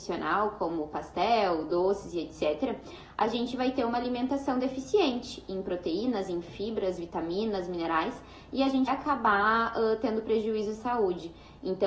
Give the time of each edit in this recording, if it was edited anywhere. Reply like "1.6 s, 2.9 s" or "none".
8.9 s, 10.7 s